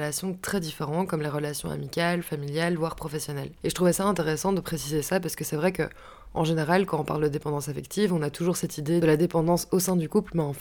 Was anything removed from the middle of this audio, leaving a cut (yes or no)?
yes